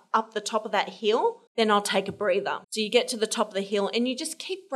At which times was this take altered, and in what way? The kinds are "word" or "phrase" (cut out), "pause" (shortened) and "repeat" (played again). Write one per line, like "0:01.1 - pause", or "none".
0:01.5 - pause
0:02.6 - pause